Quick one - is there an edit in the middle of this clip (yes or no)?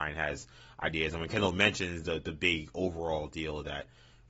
no